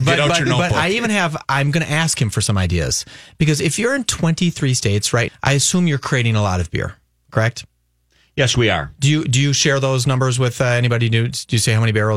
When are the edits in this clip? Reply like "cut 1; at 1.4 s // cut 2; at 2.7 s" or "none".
cut 1; at 5.3 s